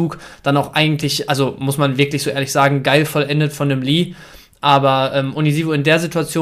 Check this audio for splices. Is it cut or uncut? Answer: uncut